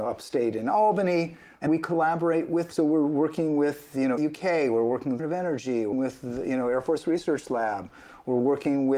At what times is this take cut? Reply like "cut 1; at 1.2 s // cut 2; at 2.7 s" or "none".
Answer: cut 1; at 1.7 s // cut 2; at 2.7 s // cut 3; at 4.2 s // cut 4; at 5.2 s // cut 5; at 5.9 s